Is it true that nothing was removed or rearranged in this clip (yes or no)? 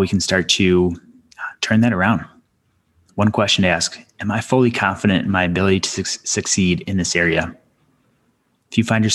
yes